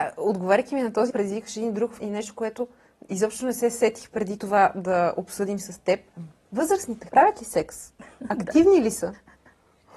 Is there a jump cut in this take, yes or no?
yes